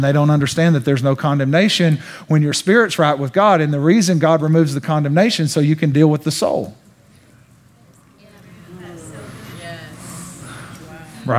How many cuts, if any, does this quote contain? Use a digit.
0